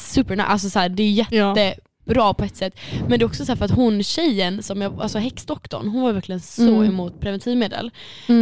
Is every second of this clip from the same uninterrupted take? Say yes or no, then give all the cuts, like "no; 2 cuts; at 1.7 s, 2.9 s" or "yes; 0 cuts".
yes; 0 cuts